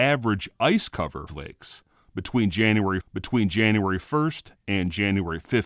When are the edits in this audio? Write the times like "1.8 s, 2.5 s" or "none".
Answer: 1.3 s, 3.0 s